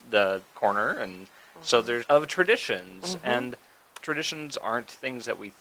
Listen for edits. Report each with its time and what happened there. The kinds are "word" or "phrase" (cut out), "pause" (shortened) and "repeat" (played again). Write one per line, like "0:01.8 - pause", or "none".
0:02.0 - phrase
0:04.0 - word